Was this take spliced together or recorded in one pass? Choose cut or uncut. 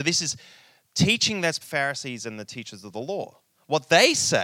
cut